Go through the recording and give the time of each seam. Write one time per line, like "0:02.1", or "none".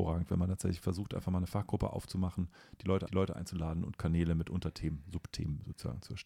0:03.1